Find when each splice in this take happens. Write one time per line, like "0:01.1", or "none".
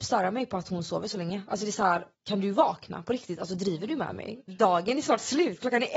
0:02.1